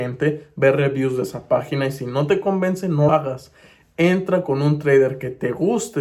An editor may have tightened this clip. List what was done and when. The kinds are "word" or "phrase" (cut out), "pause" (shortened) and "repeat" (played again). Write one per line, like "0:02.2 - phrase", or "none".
0:03.1 - word